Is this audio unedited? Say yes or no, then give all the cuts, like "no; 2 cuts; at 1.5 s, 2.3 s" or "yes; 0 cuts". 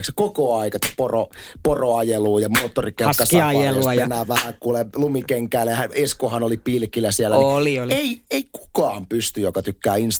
yes; 0 cuts